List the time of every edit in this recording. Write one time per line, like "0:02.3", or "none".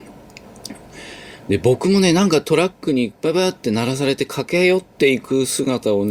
none